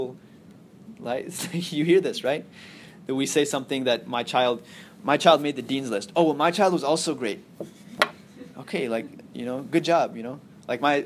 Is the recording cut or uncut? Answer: uncut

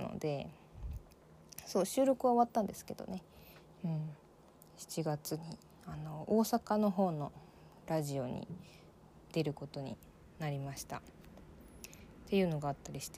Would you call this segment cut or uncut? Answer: uncut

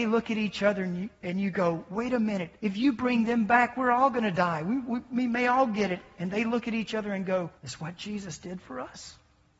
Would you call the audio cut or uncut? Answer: cut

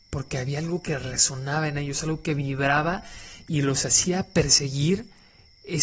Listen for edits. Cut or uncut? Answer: uncut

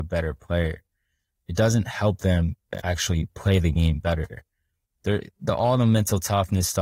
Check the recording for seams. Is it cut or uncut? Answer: uncut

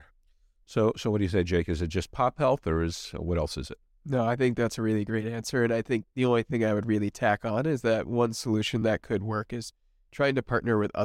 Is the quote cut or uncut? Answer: uncut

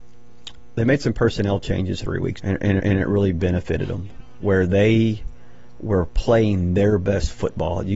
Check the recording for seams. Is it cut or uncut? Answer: cut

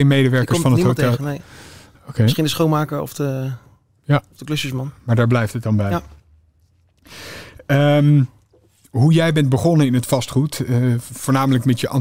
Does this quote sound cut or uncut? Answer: uncut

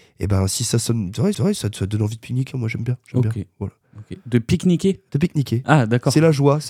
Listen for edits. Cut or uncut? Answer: cut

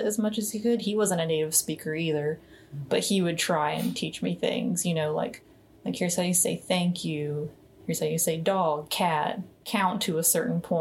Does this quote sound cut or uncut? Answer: uncut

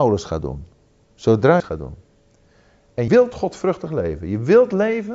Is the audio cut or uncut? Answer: cut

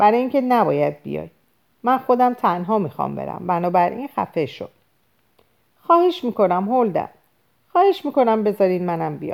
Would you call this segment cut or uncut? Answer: uncut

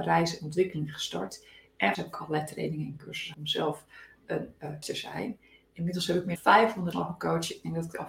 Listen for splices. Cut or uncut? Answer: cut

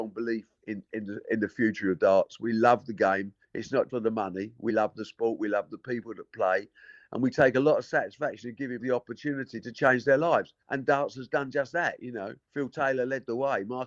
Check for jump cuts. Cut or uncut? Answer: cut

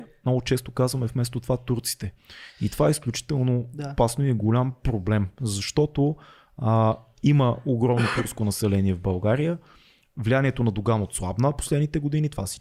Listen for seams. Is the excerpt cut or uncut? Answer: uncut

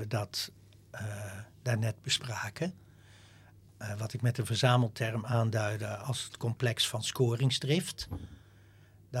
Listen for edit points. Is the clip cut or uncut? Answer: uncut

